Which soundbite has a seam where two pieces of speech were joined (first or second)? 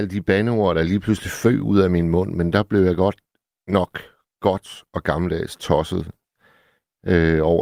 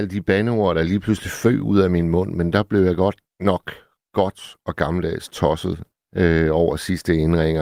second